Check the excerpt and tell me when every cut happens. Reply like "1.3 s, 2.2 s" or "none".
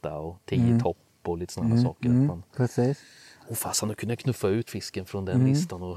4.7 s